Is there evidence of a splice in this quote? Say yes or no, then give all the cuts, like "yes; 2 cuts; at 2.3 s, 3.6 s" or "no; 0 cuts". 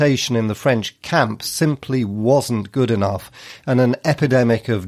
no; 0 cuts